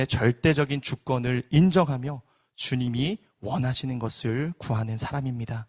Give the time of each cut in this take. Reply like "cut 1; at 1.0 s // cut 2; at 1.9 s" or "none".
none